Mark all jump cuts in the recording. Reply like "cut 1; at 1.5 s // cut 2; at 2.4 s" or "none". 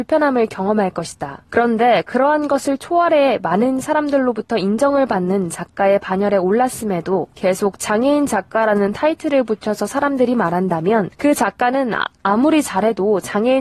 cut 1; at 1.5 s // cut 2; at 7.3 s // cut 3; at 11.1 s